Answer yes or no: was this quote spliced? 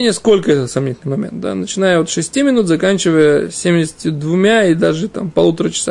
no